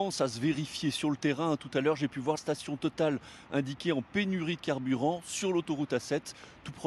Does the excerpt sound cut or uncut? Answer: cut